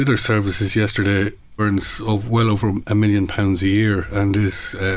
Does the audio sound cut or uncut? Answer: cut